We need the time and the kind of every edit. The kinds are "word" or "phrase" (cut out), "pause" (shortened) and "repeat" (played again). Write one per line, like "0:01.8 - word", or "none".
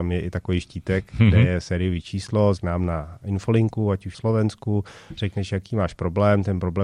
0:02.6 - word
0:04.1 - phrase